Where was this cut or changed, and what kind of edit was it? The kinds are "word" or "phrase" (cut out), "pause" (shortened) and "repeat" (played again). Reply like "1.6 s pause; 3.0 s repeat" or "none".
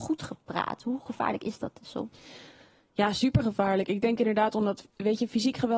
1.1 s phrase